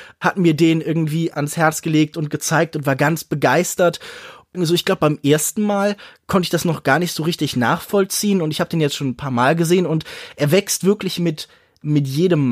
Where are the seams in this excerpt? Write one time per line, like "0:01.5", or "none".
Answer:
0:01.3